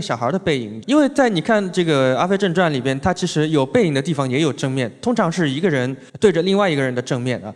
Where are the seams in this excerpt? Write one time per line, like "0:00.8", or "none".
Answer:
0:06.1

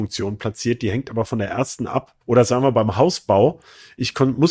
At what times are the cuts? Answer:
0:02.2

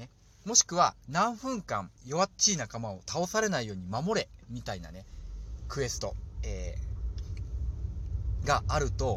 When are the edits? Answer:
0:02.0

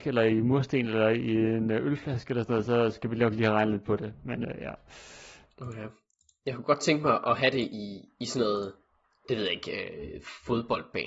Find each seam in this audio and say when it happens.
none

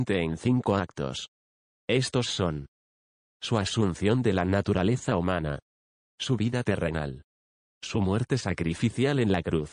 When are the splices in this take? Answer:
none

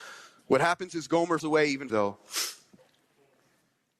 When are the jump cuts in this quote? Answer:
0:01.4
0:01.9

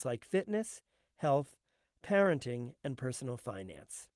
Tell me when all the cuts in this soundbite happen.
none

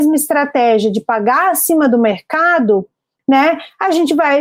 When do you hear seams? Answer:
none

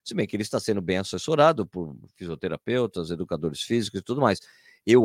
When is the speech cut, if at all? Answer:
none

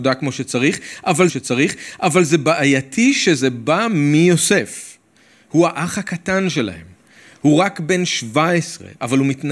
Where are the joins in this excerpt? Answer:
0:01.3

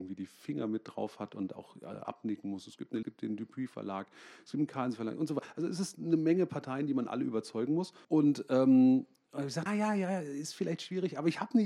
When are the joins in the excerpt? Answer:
0:03.0
0:08.0
0:09.7

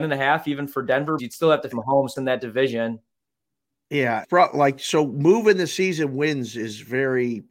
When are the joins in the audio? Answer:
0:01.2
0:01.7
0:02.2
0:04.2

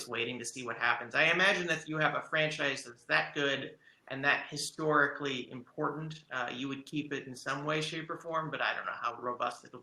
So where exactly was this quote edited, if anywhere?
none

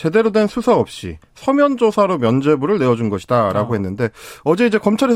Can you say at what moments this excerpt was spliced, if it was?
none

